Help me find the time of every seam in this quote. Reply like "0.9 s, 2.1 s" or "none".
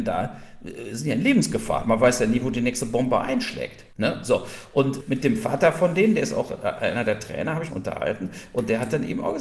3.9 s, 5.0 s, 7.7 s